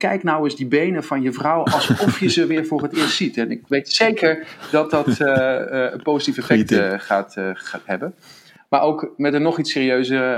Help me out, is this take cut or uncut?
uncut